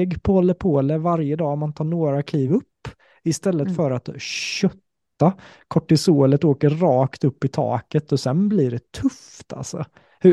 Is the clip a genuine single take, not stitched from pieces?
yes; 0 cuts

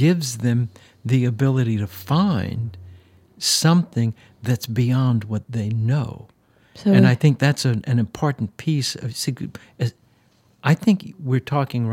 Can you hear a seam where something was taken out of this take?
no; 0 cuts

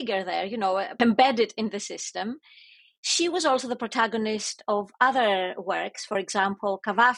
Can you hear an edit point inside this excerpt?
no; 0 cuts

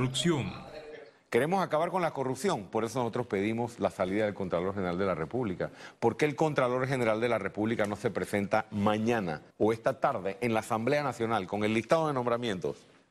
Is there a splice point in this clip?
yes; 1 cut; at 9.5 s

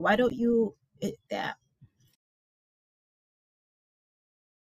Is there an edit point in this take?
yes; 1 cut; at 1.3 s

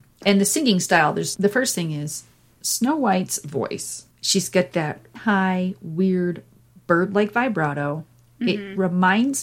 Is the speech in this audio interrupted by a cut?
yes; 2 cuts; at 1.3 s, 5.1 s

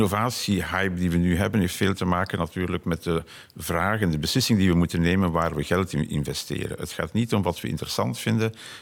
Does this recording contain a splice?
no; 0 cuts

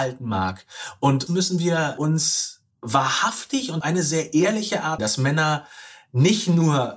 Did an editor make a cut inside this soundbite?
yes; 3 cuts; at 1.3 s, 3.8 s, 5.0 s

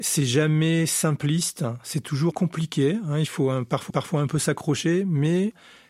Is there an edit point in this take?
yes; 2 cuts; at 2.3 s, 3.9 s

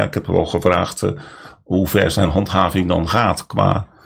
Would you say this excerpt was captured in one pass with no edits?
yes; 0 cuts

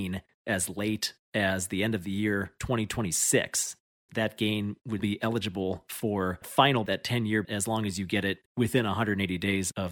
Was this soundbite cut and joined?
yes; 6 cuts; at 4.1 s, 5.0 s, 6.4 s, 6.9 s, 7.4 s, 8.5 s

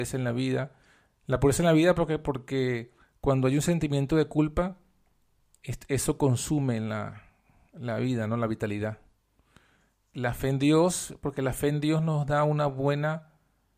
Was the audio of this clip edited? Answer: no; 0 cuts

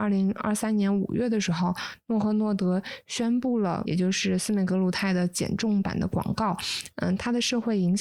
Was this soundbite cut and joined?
yes; 1 cut; at 3.8 s

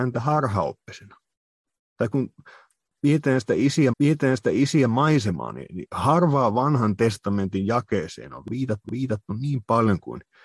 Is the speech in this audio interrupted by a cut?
yes; 2 cuts; at 3.9 s, 8.8 s

